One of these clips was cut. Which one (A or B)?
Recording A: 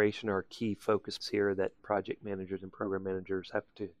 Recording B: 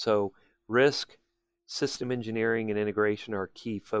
A